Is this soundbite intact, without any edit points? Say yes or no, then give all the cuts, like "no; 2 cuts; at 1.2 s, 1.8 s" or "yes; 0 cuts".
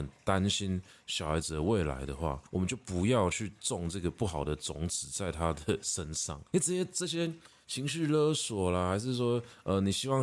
no; 2 cuts; at 2.5 s, 6.5 s